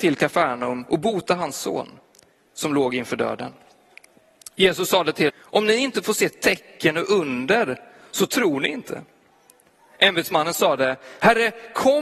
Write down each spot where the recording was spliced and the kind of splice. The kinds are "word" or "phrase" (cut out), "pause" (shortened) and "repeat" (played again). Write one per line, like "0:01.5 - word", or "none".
0:05.3 - word